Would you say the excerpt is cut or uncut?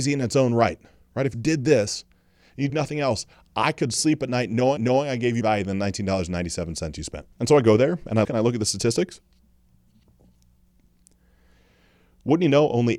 cut